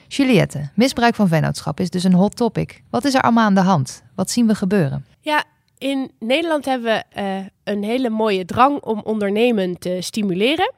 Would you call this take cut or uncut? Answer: cut